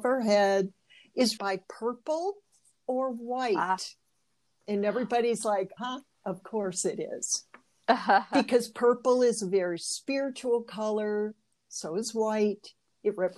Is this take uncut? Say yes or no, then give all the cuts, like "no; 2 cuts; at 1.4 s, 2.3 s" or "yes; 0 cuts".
no; 2 cuts; at 1.4 s, 5.8 s